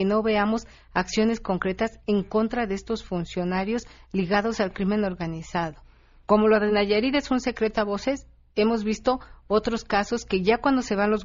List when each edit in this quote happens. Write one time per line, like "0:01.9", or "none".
none